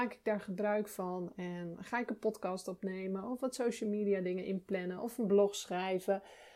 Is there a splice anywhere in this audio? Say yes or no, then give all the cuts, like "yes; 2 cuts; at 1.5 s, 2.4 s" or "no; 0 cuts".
no; 0 cuts